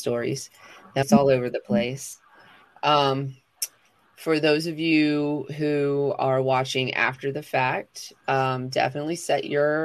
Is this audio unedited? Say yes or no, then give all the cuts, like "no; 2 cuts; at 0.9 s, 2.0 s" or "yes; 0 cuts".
no; 1 cut; at 1.0 s